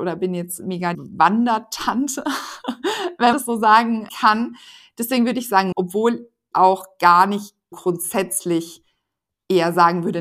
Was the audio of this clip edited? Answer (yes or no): yes